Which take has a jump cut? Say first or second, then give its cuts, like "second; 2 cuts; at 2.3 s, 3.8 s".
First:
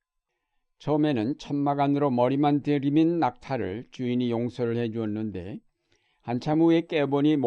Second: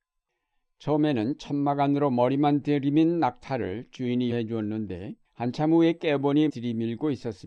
second; 3 cuts; at 4.3 s, 5.2 s, 6.5 s